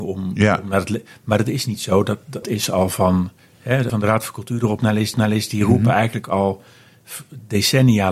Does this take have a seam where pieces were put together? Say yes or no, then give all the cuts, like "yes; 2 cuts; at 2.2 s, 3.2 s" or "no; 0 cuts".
yes; 3 cuts; at 2.4 s, 3.9 s, 5.1 s